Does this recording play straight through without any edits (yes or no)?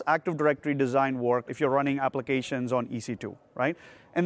no